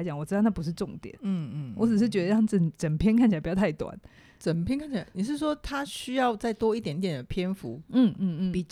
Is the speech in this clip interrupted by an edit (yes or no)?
no